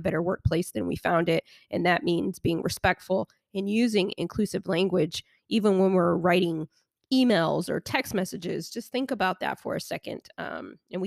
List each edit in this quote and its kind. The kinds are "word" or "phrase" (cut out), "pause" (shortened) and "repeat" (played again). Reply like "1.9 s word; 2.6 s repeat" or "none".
none